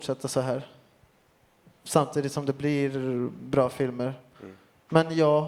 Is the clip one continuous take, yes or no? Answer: yes